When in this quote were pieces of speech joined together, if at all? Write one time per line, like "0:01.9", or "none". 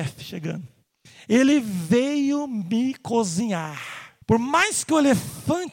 0:04.2